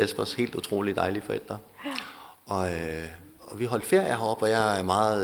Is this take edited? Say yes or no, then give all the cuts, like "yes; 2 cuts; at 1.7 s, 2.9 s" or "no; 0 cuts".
no; 0 cuts